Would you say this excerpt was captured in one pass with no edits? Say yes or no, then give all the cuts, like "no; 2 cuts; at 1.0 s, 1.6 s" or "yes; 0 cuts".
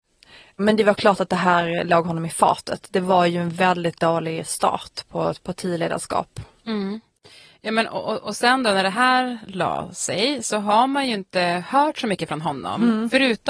yes; 0 cuts